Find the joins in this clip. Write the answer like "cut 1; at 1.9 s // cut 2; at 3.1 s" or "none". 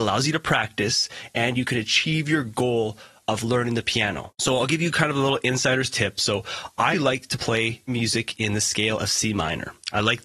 cut 1; at 6.9 s // cut 2; at 7.9 s